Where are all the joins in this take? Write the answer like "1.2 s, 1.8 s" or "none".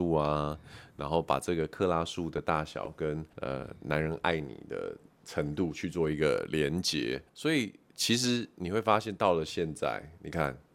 3.3 s, 7.3 s